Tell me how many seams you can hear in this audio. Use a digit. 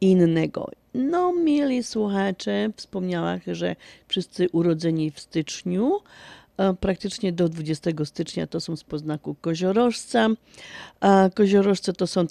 0